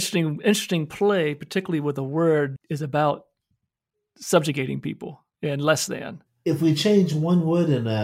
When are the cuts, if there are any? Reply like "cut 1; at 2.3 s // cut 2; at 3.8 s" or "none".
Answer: cut 1; at 2.6 s // cut 2; at 5.3 s